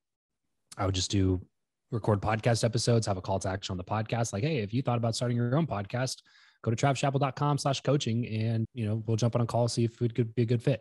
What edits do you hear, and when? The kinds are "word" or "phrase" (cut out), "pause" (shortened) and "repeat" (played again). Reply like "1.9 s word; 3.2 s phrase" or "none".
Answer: 8.6 s word